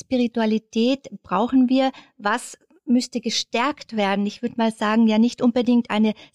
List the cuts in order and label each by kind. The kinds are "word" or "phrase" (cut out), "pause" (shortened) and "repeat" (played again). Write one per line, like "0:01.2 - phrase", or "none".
none